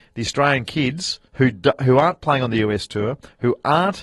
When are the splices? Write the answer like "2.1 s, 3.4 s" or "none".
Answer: 1.3 s